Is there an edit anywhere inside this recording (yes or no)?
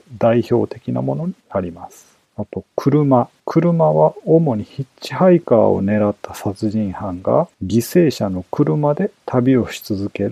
yes